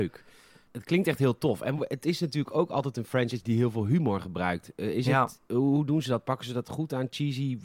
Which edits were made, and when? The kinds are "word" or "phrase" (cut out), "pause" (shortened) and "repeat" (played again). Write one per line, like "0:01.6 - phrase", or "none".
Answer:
none